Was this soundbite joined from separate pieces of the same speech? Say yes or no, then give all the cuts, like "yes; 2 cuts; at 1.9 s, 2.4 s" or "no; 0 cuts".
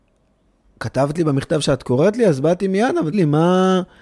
yes; 1 cut; at 3.1 s